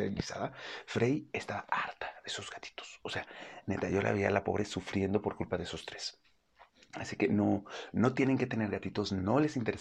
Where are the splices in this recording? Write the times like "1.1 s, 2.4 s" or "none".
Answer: none